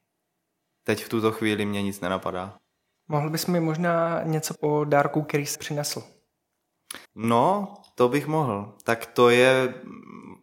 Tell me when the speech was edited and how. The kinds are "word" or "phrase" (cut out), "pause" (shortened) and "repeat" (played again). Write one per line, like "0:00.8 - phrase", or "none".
0:02.9 - pause
0:04.5 - word
0:05.5 - word
0:07.0 - pause